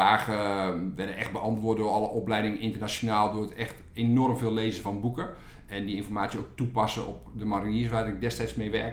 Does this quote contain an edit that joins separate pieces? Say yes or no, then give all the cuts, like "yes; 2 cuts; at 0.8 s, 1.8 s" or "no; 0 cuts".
no; 0 cuts